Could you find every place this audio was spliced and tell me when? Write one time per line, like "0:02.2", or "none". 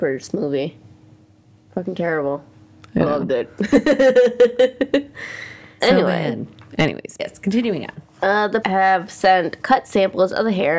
0:05.8
0:07.2
0:08.6
0:09.6